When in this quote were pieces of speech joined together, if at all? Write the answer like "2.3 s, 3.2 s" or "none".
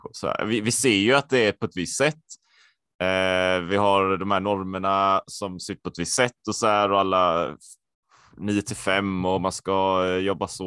none